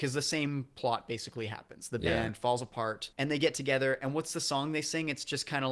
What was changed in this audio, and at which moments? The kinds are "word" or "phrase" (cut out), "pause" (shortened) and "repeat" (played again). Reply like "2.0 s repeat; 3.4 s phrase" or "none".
3.1 s pause